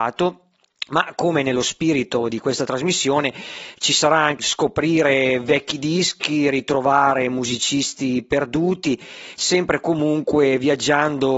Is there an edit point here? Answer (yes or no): yes